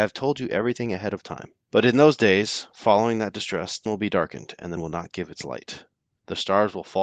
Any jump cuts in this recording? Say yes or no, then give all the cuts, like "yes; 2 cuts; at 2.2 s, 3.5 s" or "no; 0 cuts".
yes; 3 cuts; at 1.6 s, 3.9 s, 4.8 s